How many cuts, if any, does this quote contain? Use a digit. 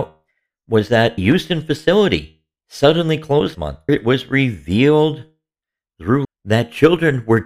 4